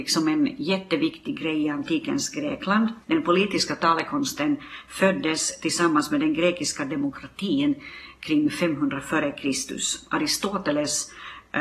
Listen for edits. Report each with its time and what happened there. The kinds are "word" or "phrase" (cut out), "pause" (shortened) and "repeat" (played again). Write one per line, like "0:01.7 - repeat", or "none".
0:03.0 - pause